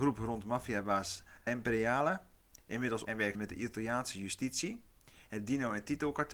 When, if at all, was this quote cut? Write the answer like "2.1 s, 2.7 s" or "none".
1.5 s, 3.0 s, 3.3 s